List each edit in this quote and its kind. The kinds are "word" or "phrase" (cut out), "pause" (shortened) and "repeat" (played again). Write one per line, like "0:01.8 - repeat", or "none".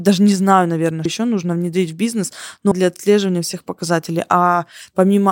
0:01.1 - word
0:02.7 - word